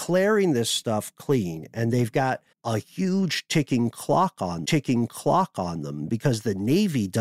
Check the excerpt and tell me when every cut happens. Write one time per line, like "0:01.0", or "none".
0:02.5
0:04.6